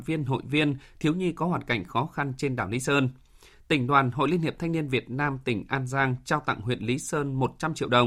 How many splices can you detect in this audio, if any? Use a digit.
0